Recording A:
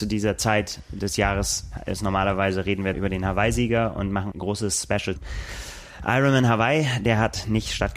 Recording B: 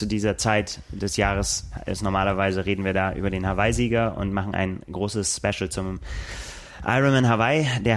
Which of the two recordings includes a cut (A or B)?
A